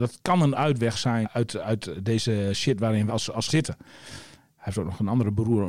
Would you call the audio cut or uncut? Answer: cut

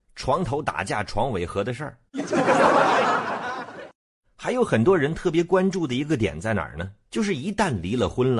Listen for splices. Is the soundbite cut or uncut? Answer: uncut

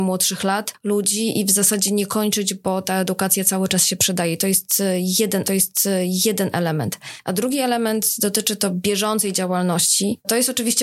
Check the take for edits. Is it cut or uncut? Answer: cut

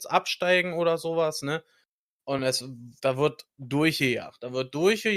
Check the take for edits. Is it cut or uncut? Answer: uncut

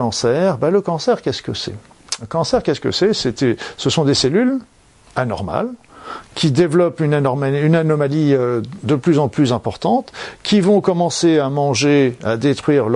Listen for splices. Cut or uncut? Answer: uncut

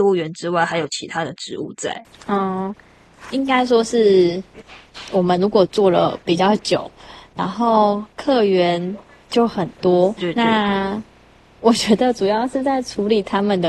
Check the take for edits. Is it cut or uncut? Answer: cut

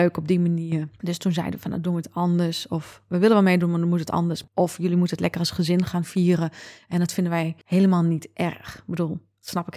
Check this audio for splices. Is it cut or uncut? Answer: uncut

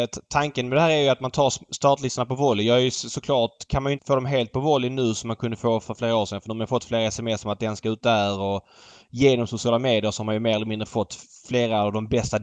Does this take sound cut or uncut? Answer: cut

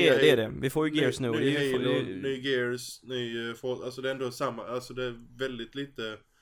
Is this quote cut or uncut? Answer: uncut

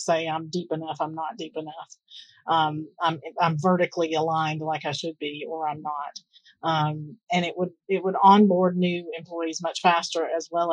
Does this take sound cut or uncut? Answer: uncut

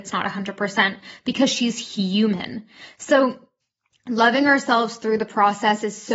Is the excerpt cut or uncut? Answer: uncut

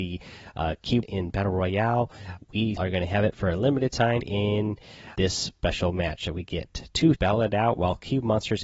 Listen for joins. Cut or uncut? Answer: cut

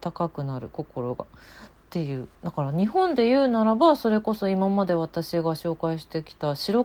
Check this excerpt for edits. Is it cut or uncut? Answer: cut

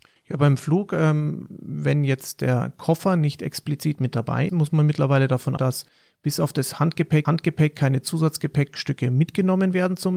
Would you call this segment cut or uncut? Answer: cut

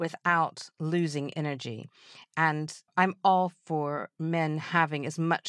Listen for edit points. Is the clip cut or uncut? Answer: cut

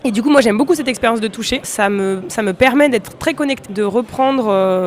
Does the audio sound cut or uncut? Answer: cut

